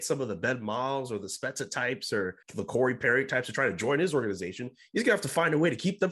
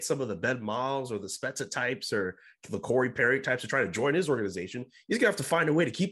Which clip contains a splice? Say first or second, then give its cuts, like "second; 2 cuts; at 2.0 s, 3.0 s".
first; 1 cut; at 2.4 s